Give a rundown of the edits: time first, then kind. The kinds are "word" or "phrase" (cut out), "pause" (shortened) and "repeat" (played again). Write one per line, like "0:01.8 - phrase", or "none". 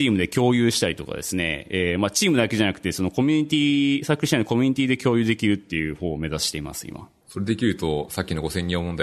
none